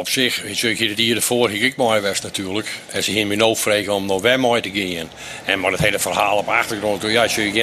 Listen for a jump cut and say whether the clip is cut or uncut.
uncut